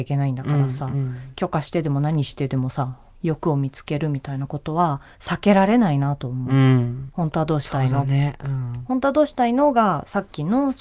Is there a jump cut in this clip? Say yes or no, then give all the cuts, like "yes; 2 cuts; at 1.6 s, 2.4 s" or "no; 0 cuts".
no; 0 cuts